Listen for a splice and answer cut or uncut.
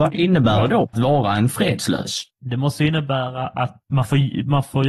cut